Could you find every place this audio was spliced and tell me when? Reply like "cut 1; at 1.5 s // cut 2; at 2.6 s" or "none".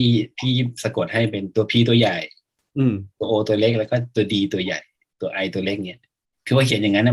none

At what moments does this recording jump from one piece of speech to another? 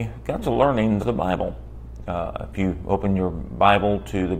cut 1; at 1.0 s

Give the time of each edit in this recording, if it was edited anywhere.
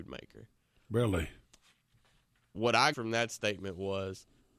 cut 1; at 2.9 s

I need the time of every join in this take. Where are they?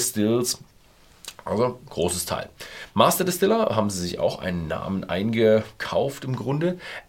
none

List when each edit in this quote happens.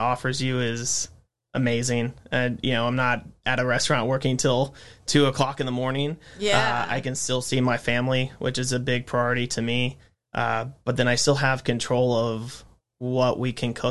none

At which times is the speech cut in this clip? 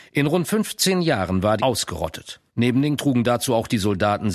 cut 1; at 1.6 s // cut 2; at 2.5 s // cut 3; at 3.0 s

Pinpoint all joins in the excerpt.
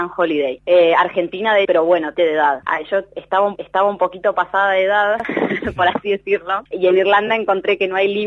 cut 1; at 1.6 s // cut 2; at 2.1 s // cut 3; at 3.6 s

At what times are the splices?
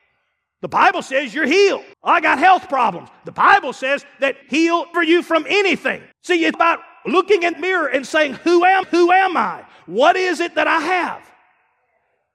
cut 1; at 1.9 s // cut 2; at 4.4 s // cut 3; at 4.9 s // cut 4; at 6.1 s // cut 5; at 6.5 s // cut 6; at 7.5 s // cut 7; at 8.8 s

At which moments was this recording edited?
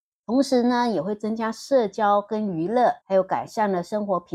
cut 1; at 3.0 s

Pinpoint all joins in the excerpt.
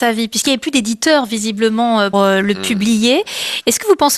cut 1; at 2.1 s

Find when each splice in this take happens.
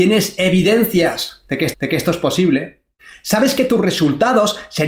cut 1; at 1.7 s // cut 2; at 3.0 s

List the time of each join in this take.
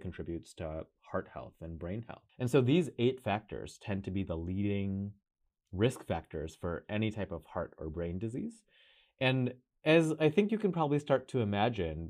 cut 1; at 2.3 s

